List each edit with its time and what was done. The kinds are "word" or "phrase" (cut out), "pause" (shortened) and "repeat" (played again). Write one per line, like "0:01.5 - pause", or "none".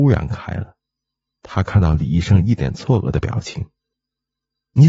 0:03.9 - pause